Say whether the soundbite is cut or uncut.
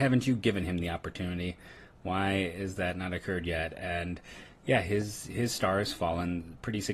uncut